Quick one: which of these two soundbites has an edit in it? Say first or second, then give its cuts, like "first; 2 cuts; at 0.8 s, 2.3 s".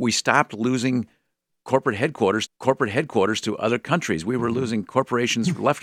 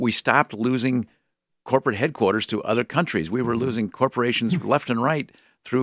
first; 1 cut; at 2.5 s